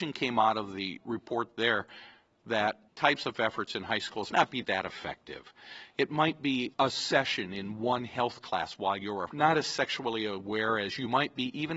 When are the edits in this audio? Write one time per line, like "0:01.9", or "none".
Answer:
0:02.9
0:04.3
0:06.7
0:09.3